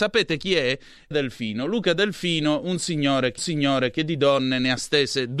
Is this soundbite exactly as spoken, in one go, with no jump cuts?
no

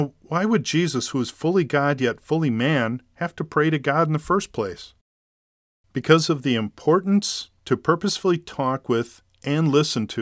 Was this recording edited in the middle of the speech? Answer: no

